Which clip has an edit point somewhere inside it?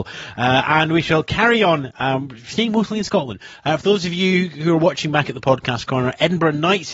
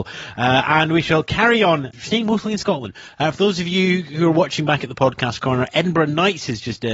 second; 1 cut; at 1.9 s

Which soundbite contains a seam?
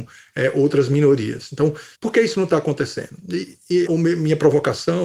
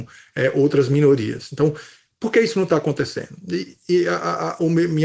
first; 2 cuts; at 1.9 s, 3.9 s

